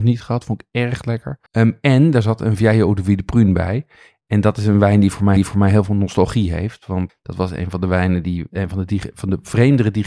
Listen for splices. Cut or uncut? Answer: cut